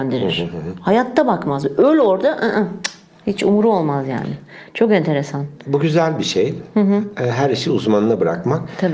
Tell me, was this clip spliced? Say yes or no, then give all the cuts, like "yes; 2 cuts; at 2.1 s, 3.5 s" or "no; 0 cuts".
no; 0 cuts